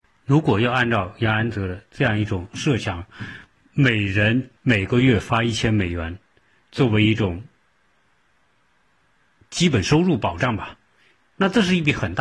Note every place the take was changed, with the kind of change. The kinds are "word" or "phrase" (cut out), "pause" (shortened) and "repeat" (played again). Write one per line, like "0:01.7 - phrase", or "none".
0:04.6 - pause